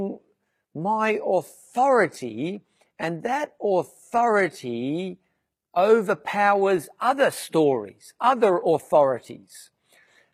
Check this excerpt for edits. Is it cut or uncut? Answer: uncut